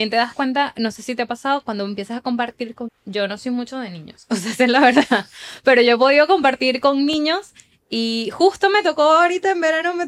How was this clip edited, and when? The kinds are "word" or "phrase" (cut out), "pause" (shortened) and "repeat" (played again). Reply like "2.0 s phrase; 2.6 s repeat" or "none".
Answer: 2.9 s word